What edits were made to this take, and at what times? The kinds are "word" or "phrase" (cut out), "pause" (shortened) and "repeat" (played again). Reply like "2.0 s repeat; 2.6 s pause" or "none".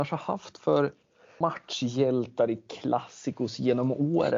1.4 s word